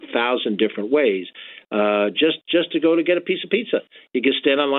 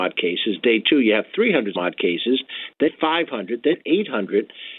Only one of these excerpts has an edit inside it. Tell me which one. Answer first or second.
second